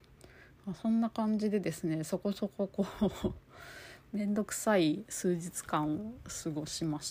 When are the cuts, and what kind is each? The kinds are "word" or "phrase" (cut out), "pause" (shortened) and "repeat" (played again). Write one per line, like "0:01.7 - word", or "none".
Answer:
none